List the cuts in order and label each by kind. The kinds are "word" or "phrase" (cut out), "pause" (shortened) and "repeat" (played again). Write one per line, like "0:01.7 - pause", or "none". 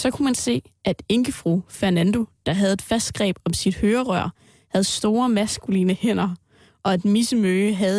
none